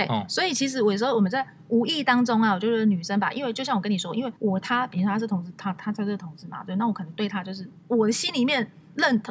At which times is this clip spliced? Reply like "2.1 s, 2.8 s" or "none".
4.4 s